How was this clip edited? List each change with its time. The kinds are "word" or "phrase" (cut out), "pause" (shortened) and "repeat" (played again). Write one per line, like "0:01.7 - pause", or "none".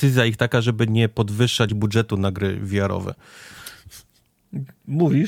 none